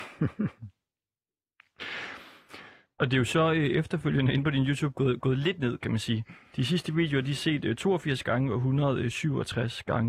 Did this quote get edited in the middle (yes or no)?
no